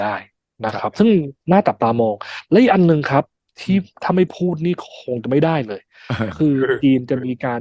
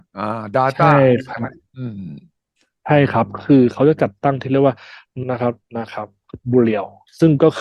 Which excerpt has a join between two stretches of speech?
second; 2 cuts; at 5.2 s, 5.6 s

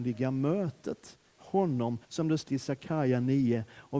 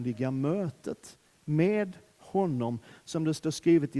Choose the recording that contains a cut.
first; 3 cuts; at 1.3 s, 2.0 s, 2.5 s

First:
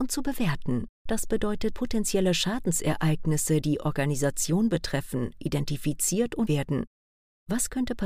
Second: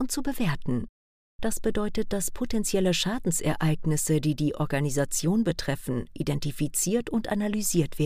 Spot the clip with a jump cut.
first; 4 cuts; at 1.0 s, 1.7 s, 3.6 s, 6.5 s

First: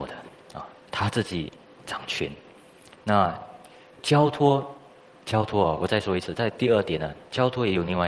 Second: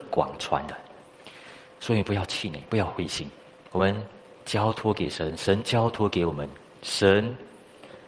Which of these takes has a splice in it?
second; 1 cut; at 3.7 s

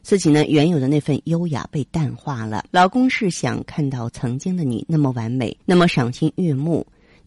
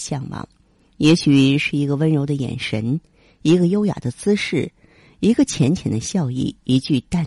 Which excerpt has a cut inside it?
first; 2 cuts; at 2.7 s, 5.6 s

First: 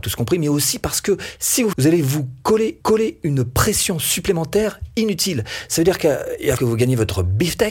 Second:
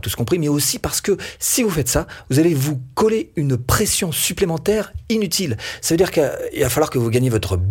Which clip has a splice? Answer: first; 3 cuts; at 1.7 s, 2.8 s, 6.6 s

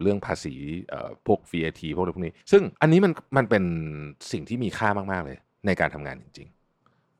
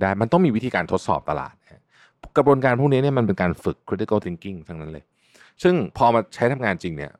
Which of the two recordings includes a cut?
first; 2 cuts; at 2.4 s, 2.8 s

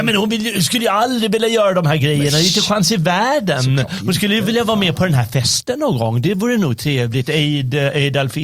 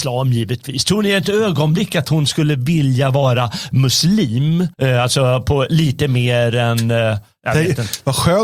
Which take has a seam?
second; 1 cut; at 4.7 s

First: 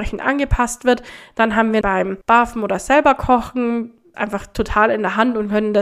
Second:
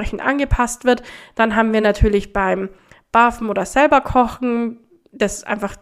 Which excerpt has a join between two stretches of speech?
first; 3 cuts; at 1.8 s, 2.2 s, 4.1 s

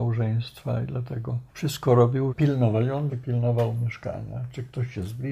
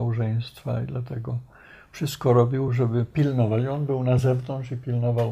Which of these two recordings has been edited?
first; 3 cuts; at 1.5 s, 2.3 s, 3.1 s

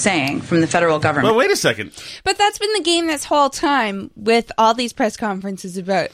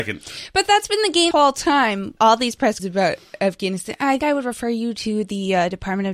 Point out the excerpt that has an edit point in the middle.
second; 4 cuts; at 1.3 s, 2.2 s, 2.8 s, 4.2 s

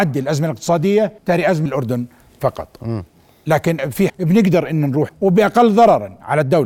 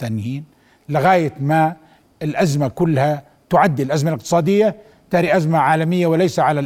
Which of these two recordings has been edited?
first; 5 cuts; at 1.2 s, 1.7 s, 3.8 s, 4.1 s, 5.1 s

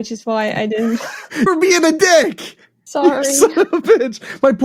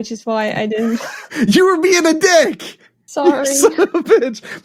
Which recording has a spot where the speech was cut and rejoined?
first; 1 cut; at 1.5 s

